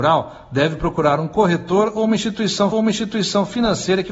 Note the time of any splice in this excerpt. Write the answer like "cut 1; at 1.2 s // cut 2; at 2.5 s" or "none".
cut 1; at 2.7 s